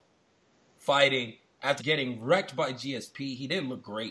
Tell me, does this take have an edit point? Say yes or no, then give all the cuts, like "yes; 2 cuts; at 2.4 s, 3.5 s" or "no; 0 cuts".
yes; 1 cut; at 1.8 s